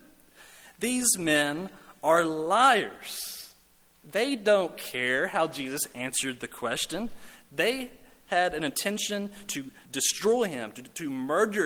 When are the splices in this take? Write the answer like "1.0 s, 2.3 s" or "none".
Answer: 9.8 s